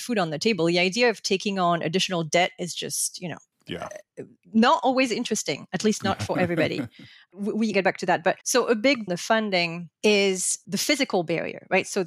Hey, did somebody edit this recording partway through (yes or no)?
yes